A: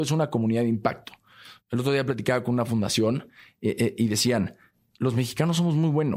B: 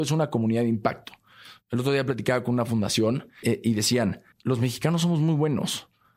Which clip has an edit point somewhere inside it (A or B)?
B